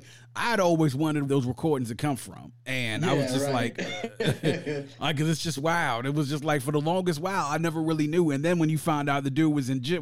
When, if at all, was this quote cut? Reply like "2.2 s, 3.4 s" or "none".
1.3 s